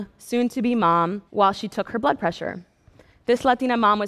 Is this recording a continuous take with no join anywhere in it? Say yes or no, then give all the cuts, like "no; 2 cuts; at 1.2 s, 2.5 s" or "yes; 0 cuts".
no; 1 cut; at 1.3 s